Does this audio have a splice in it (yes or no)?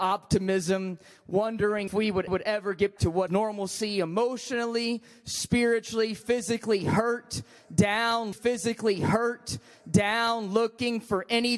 yes